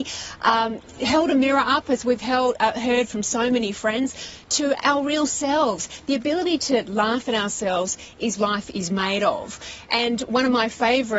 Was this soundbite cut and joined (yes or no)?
yes